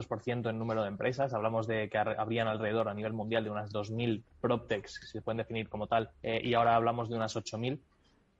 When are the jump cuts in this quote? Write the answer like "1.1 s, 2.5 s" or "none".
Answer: 6.1 s